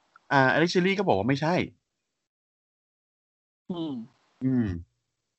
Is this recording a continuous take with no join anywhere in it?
yes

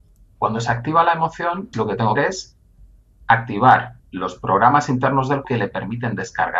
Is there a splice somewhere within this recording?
yes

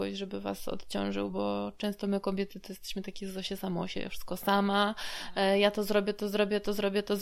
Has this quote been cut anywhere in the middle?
no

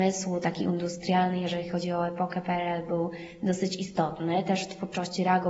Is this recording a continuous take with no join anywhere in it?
yes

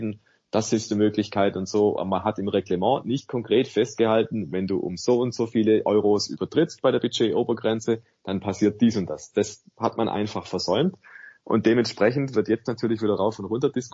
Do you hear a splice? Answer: no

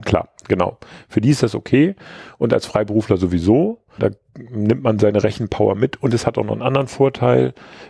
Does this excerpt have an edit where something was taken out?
yes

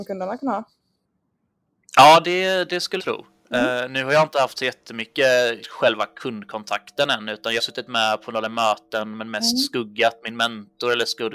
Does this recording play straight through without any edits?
no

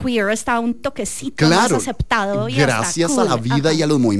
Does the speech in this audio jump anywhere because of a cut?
no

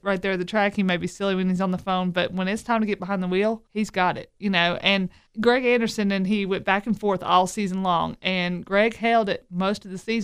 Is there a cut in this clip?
yes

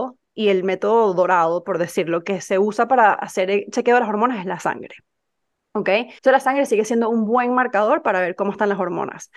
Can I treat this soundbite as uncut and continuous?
no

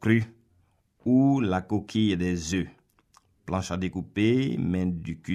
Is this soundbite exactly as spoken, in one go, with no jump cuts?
yes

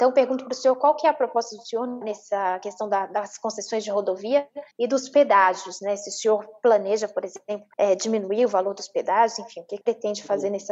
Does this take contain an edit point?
yes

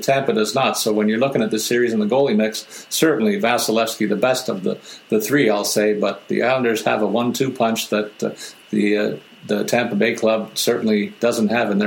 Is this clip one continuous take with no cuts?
yes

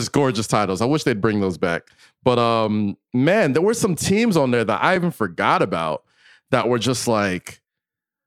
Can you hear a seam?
no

